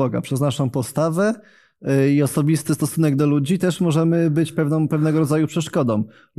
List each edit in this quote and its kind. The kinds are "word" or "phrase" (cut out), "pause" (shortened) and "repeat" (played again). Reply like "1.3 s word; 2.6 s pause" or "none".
none